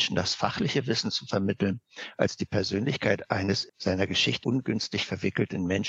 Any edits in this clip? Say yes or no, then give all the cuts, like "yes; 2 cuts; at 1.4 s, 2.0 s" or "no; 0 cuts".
yes; 2 cuts; at 3.7 s, 4.4 s